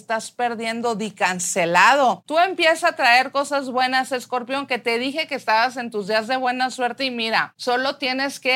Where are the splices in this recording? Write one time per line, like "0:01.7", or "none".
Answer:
none